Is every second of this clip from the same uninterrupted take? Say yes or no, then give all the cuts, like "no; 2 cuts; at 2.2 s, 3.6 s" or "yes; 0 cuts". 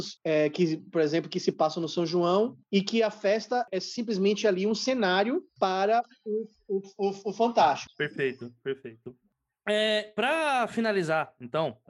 yes; 0 cuts